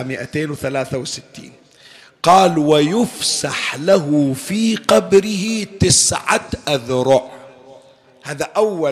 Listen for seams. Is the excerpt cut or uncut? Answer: uncut